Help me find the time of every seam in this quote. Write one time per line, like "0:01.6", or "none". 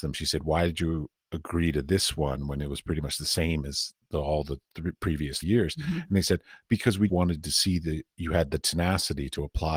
0:05.4
0:07.1